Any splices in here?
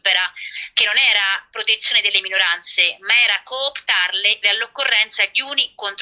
yes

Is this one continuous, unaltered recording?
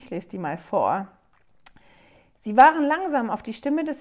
yes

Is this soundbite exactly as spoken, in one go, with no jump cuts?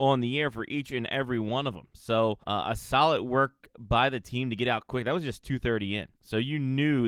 no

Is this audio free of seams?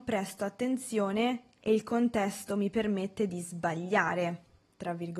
yes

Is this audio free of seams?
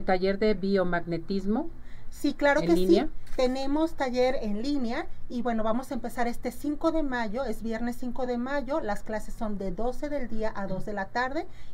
yes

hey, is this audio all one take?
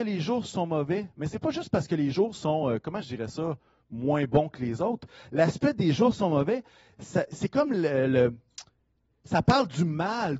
yes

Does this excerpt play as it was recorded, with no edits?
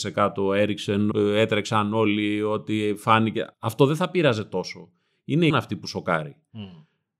no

